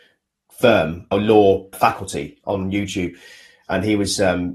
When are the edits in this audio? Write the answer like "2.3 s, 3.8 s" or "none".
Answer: 1.1 s, 1.7 s